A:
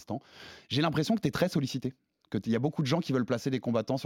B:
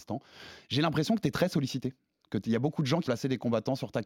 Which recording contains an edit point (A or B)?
B